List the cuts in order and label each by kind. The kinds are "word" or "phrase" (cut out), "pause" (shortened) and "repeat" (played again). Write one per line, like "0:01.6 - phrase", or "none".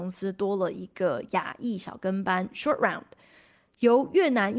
none

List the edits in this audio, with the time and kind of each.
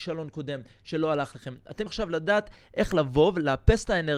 0:01.9 - word

